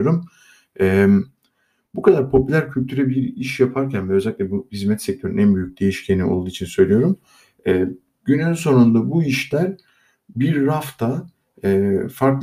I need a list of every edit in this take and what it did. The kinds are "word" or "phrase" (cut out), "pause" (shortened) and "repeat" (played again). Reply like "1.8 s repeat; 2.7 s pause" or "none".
none

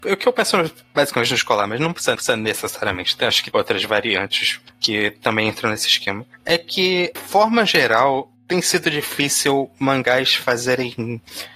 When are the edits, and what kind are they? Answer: 2.2 s repeat; 3.5 s word; 7.2 s phrase

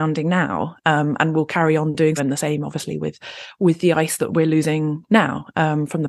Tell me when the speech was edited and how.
2.2 s word

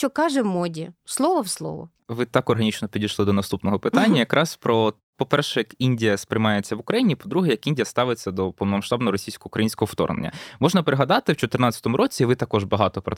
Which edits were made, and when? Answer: 1.0 s pause; 2.0 s pause

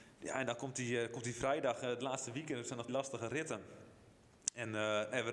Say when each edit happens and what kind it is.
2.9 s word

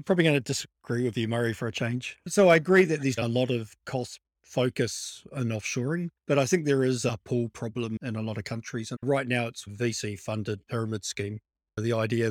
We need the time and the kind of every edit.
3.2 s word; 4.3 s pause; 6.2 s pause; 8.9 s phrase; 9.7 s phrase

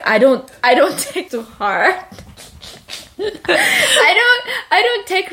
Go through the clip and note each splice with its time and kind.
1.3 s word

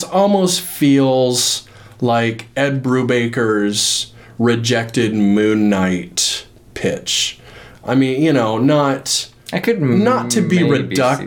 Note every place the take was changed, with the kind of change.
9.4 s pause

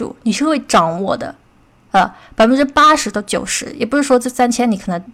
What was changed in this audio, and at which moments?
none

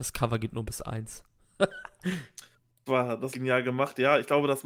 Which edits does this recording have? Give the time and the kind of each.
2.9 s word; 3.3 s phrase

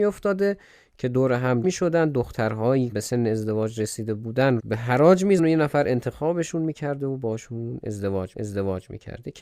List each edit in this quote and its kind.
1.6 s word; 2.9 s word; 4.6 s word; 5.4 s word; 8.3 s repeat

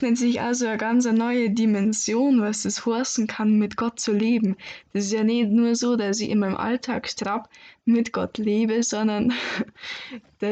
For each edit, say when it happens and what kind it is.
none

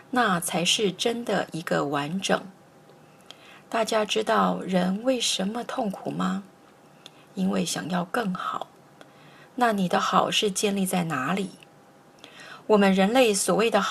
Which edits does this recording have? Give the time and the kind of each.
none

